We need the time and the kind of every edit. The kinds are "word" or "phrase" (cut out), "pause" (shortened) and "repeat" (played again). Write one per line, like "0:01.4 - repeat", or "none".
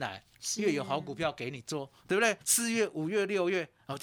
0:02.4 - pause